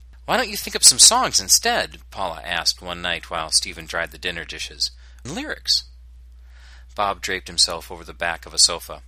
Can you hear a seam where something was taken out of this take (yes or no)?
yes